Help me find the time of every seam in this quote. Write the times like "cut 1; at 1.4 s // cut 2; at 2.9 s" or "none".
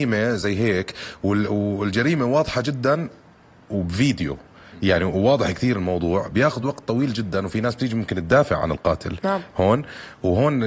none